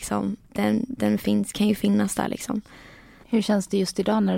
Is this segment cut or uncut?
uncut